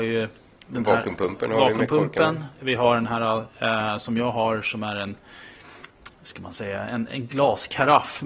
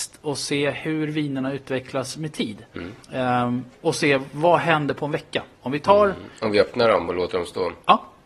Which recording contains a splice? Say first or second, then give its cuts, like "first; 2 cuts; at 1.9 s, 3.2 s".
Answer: second; 2 cuts; at 3.0 s, 5.5 s